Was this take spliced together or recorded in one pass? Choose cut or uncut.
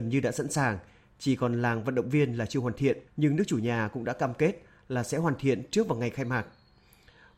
cut